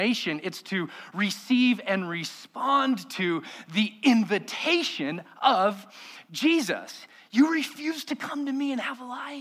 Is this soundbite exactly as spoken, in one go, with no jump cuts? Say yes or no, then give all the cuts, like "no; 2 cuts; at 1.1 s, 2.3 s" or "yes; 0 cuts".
yes; 0 cuts